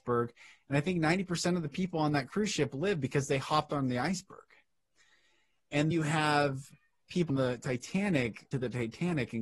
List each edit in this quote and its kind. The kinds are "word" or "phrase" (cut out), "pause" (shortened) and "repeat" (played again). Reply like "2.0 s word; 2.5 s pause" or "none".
5.9 s word; 7.3 s word; 8.5 s word